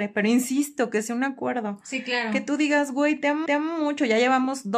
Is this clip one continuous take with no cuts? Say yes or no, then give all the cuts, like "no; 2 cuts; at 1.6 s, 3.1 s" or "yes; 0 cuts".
no; 1 cut; at 3.5 s